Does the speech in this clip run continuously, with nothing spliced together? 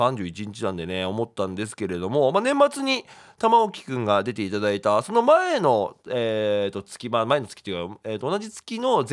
yes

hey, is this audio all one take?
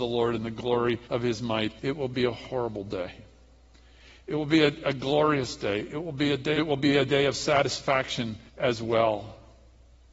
no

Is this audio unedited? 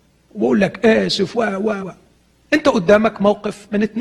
no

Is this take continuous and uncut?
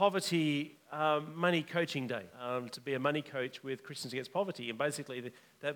no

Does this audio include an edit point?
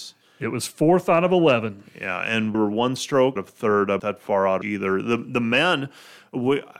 yes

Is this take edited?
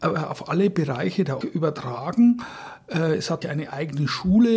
yes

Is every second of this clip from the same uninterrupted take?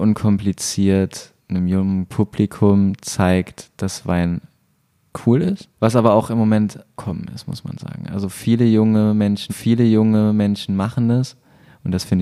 no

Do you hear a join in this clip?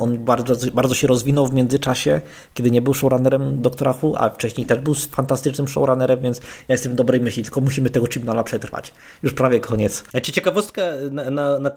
no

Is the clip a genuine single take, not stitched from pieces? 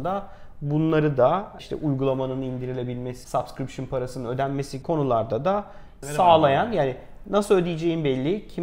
no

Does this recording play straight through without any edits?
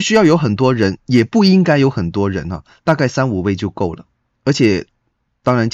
no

